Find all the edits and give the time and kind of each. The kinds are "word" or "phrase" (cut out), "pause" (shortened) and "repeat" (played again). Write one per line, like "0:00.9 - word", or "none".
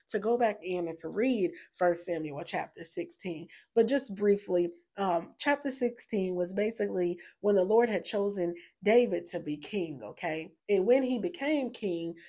0:10.6 - pause